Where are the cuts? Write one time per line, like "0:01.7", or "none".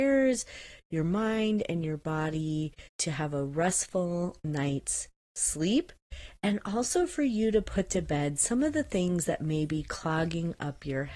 0:02.9